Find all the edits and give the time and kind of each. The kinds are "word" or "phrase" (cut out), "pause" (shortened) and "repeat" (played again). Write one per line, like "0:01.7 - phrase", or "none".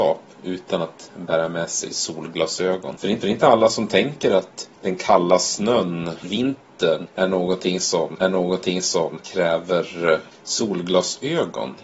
0:03.2 - repeat
0:04.8 - pause
0:06.2 - word
0:08.2 - repeat